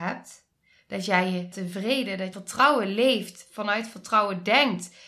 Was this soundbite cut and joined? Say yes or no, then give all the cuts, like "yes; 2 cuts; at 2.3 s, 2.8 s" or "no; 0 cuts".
yes; 2 cuts; at 1.5 s, 2.3 s